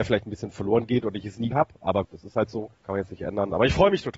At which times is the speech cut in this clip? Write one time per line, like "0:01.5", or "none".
0:01.5
0:02.0
0:02.7